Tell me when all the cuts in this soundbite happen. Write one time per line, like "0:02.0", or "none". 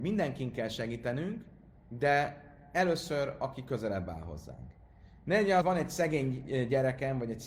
0:05.6